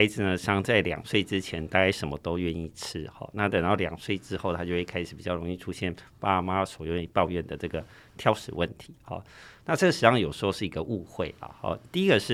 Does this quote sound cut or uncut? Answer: uncut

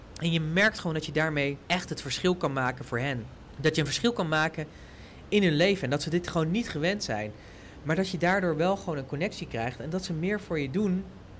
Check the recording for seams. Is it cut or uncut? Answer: uncut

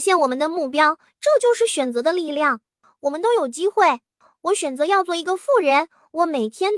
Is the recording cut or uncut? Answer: uncut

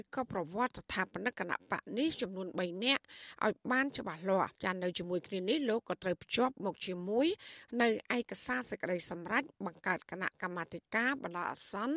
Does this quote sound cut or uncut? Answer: cut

